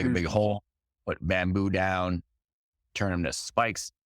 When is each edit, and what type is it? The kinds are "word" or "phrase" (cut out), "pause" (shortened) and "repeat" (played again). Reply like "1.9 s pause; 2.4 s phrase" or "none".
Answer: none